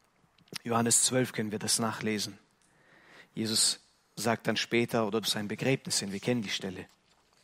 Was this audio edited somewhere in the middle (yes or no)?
yes